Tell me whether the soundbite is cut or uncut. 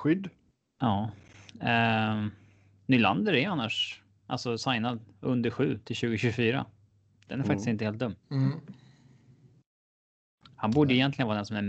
cut